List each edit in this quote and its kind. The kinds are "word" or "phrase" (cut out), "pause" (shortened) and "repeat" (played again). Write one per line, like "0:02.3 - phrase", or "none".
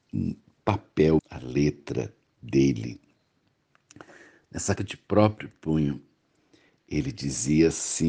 0:01.2 - word
0:04.8 - word